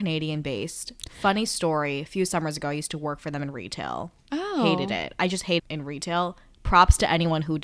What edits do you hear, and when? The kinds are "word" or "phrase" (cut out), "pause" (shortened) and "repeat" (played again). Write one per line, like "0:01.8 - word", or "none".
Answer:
0:05.6 - word